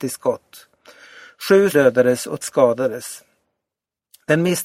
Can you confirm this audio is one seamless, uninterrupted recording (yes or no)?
no